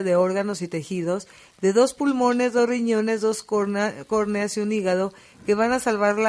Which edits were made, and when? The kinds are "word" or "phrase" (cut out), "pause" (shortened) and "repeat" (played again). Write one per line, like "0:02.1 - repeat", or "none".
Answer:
none